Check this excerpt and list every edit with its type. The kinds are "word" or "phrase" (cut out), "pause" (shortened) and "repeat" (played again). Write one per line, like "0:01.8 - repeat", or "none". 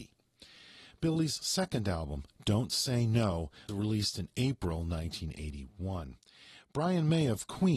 0:03.7 - word

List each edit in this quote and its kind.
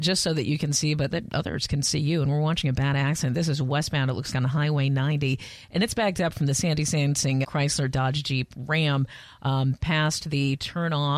0:01.1 - word
0:04.3 - word
0:07.4 - word

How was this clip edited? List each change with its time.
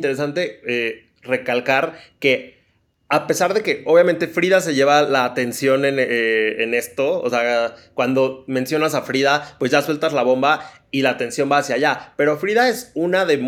none

